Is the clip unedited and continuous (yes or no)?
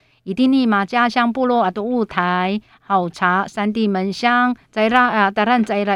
no